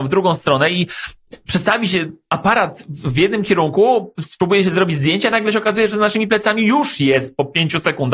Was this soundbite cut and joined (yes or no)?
no